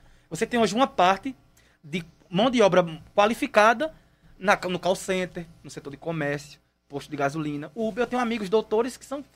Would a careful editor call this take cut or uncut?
uncut